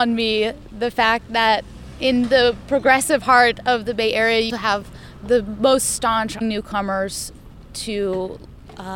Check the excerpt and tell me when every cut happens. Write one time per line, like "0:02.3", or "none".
0:04.5
0:06.4